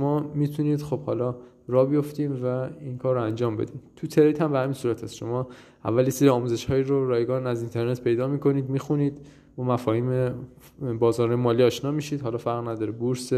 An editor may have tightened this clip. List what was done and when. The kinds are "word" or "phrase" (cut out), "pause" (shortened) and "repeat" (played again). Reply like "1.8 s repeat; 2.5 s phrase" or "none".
none

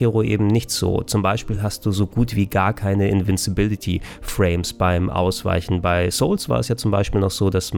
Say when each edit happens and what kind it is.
none

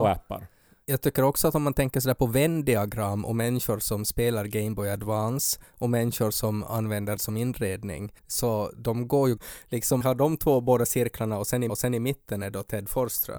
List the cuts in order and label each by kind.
7.2 s word; 8.2 s pause; 9.4 s word; 10.0 s phrase; 11.7 s repeat

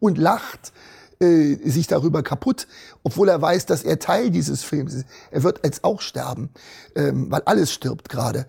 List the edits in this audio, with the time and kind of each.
none

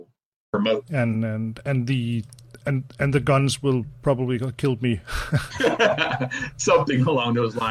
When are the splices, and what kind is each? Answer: none

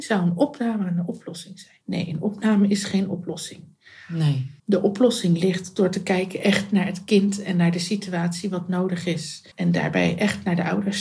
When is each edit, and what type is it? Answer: 1.8 s pause; 4.6 s pause; 9.5 s pause

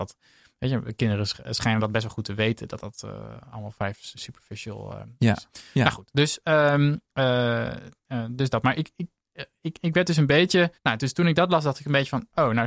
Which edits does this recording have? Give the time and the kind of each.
10.8 s pause

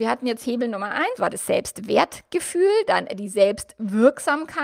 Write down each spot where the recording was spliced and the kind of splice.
1.2 s word

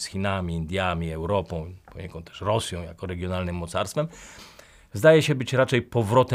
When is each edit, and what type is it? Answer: none

